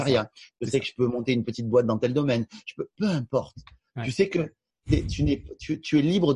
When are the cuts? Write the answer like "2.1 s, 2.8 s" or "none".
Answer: none